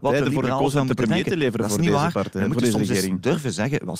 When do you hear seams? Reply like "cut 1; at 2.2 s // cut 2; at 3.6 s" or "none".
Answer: none